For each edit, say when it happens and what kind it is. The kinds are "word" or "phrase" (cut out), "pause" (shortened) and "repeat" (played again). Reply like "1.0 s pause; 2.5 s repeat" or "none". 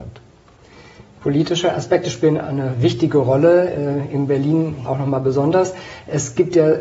4.8 s word